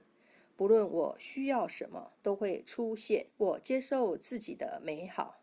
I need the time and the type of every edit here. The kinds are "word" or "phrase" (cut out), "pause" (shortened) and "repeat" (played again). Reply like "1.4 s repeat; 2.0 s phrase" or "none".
2.2 s pause; 3.3 s pause